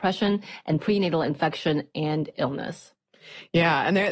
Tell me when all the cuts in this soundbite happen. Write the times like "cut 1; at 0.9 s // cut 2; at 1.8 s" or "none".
none